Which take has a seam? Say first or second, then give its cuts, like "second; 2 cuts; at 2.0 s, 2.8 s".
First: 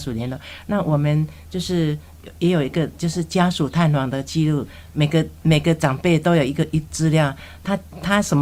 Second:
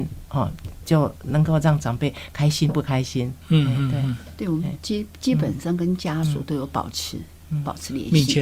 second; 1 cut; at 3.4 s